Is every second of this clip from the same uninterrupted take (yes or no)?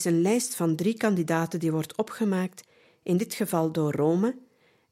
yes